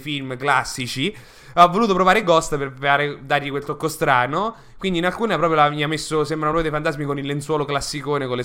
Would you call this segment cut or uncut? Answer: uncut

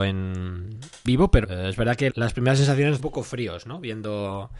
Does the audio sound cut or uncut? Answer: cut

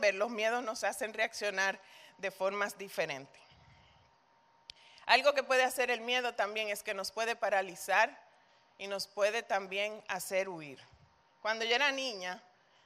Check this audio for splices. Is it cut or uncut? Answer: uncut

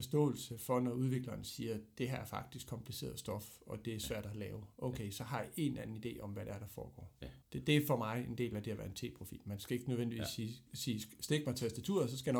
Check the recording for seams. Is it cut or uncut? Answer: cut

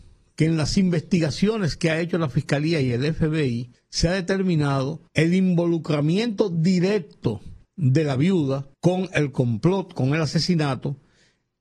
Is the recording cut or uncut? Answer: cut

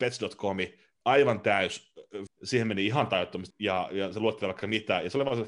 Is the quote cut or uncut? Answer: cut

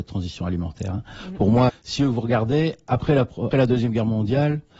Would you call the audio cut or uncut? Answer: cut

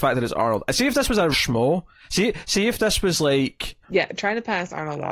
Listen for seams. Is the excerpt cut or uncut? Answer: cut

